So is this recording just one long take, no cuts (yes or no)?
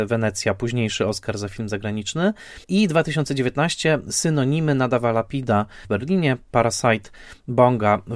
no